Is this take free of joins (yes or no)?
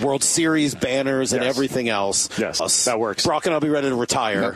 no